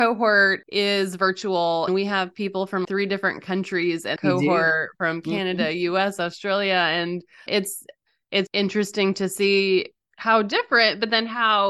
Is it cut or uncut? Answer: cut